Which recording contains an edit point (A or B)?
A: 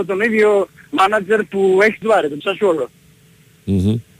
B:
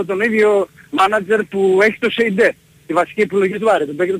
A